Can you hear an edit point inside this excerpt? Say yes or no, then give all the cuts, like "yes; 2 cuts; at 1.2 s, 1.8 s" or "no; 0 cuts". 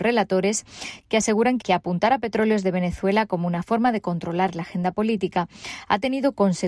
no; 0 cuts